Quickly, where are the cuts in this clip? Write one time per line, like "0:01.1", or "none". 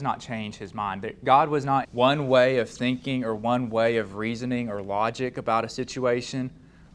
0:01.8